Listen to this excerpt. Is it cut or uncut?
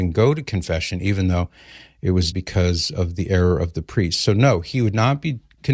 cut